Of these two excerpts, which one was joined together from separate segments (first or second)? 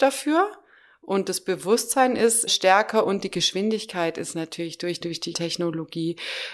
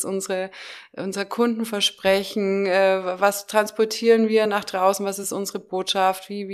first